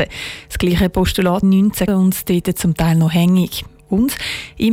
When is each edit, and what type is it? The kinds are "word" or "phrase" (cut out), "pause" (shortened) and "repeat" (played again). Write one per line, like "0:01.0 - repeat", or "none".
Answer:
0:01.4 - phrase
0:01.9 - phrase